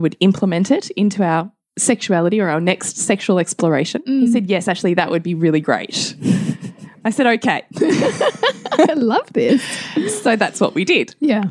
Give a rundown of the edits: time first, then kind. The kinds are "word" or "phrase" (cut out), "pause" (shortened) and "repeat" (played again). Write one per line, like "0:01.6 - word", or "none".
none